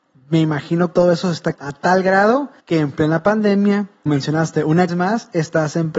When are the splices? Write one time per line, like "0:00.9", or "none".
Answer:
0:00.9
0:01.5
0:02.6
0:04.1
0:04.9

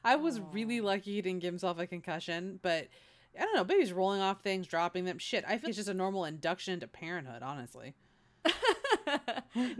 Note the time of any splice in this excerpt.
0:05.6

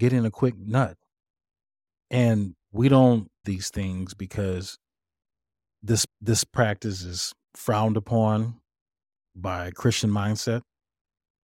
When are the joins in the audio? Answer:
0:03.4
0:06.1
0:07.4

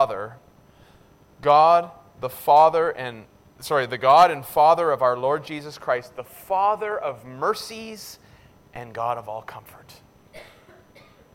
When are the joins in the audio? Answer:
none

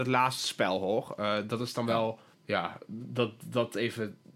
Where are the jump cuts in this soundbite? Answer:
0:02.3

